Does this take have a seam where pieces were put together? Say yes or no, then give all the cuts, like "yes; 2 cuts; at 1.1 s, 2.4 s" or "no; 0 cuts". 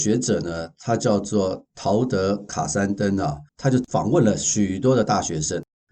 yes; 1 cut; at 3.5 s